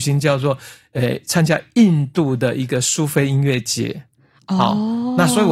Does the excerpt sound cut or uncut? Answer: uncut